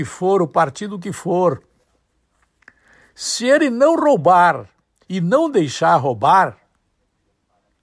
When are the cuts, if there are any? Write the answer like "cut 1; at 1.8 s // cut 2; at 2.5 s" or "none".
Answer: none